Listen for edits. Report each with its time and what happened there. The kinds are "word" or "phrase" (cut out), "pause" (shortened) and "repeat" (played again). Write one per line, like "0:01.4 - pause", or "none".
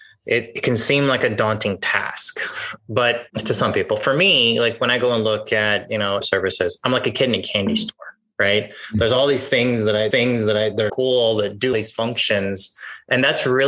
0:03.3 - pause
0:06.2 - phrase
0:10.1 - repeat
0:10.9 - word
0:11.7 - word

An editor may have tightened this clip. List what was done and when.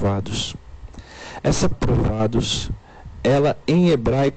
0:01.7 - word

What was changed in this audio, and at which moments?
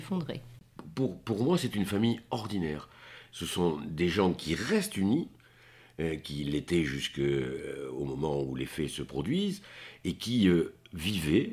none

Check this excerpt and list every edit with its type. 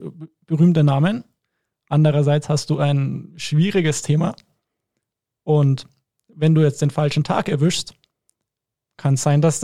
none

